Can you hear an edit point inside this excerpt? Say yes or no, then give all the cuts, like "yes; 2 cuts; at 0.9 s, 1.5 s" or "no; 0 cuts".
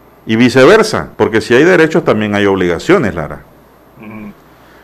yes; 1 cut; at 1.1 s